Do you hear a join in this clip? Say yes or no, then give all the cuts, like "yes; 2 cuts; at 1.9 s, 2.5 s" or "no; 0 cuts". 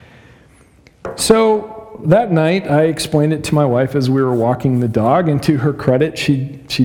no; 0 cuts